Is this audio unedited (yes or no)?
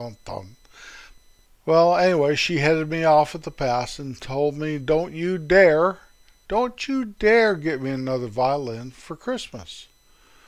yes